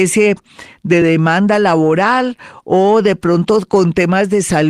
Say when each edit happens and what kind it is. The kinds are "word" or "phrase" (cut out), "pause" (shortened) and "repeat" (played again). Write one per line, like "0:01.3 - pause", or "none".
none

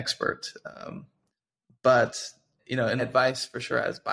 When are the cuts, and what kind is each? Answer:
0:02.6 - word
0:03.0 - word

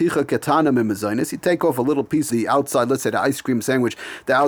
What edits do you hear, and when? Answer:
0:02.3 - word

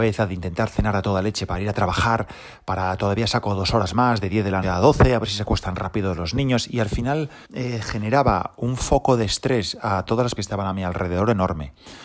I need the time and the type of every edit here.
0:04.6 - word
0:07.4 - pause
0:10.4 - word

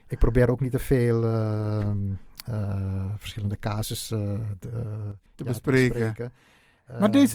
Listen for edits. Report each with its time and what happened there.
0:05.3 - pause

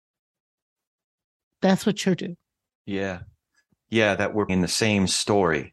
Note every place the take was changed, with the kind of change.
0:02.2 - word
0:04.5 - word

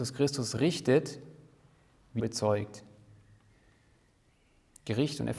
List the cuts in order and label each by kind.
0:02.2 - phrase

